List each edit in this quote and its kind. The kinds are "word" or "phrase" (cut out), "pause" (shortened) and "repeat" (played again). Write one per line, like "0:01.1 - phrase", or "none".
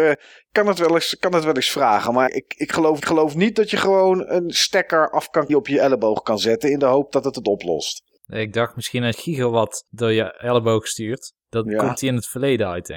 0:02.3 - word
0:03.0 - repeat
0:05.5 - phrase
0:09.1 - word
0:11.4 - pause